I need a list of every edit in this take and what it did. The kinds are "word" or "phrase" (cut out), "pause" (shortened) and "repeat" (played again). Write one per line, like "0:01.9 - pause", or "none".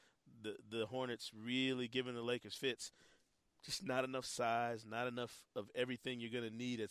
none